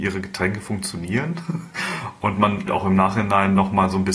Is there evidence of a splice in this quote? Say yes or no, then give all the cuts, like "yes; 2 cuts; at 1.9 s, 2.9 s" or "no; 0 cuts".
yes; 1 cut; at 2.7 s